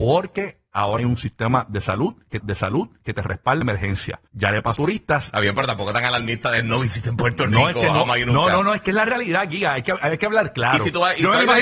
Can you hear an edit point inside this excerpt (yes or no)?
yes